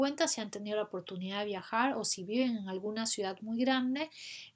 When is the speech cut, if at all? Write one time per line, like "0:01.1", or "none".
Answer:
none